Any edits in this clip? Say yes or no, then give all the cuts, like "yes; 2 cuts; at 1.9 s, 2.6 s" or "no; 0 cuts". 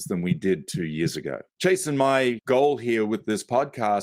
yes; 1 cut; at 1.5 s